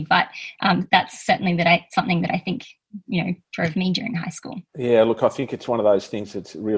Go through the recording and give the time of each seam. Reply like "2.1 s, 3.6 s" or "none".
4.7 s